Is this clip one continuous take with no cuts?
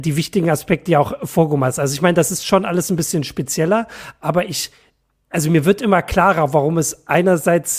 yes; 0 cuts

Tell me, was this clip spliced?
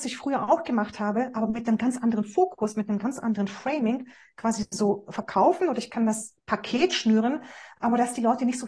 no; 0 cuts

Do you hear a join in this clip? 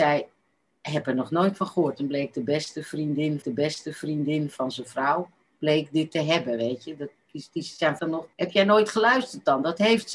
yes; 3 cuts; at 3.4 s, 8.0 s, 8.3 s

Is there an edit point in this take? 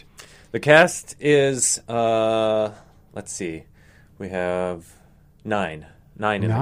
no; 0 cuts

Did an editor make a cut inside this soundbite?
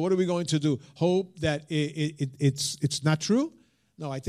no; 0 cuts

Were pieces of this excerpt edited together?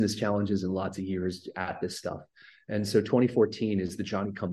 no; 0 cuts

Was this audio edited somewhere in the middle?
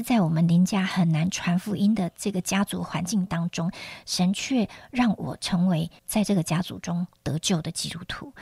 yes; 1 cut; at 6.0 s

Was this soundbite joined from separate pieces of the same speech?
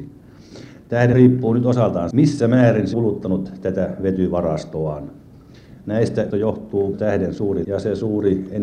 yes; 6 cuts; at 1.1 s, 2.1 s, 2.9 s, 6.3 s, 6.9 s, 7.6 s

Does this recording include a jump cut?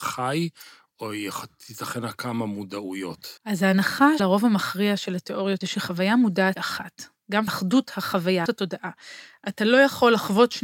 yes; 6 cuts; at 3.4 s, 4.2 s, 5.6 s, 6.6 s, 7.5 s, 8.5 s

